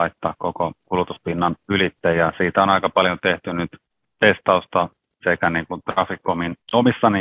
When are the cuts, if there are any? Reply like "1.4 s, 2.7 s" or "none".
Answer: none